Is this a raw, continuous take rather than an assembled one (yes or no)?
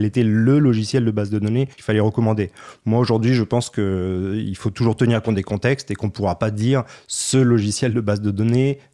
no